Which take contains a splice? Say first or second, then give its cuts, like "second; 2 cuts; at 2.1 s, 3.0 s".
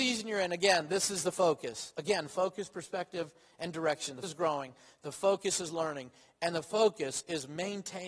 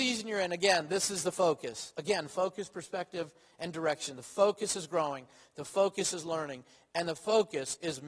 first; 1 cut; at 4.2 s